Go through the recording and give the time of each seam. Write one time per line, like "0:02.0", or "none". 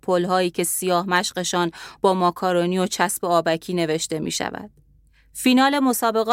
none